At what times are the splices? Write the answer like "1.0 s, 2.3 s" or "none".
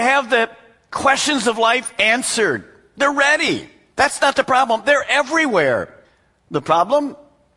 none